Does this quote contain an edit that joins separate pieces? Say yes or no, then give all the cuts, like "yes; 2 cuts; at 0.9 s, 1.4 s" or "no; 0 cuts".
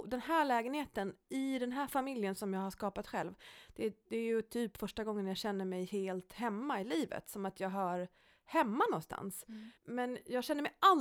yes; 1 cut; at 9.8 s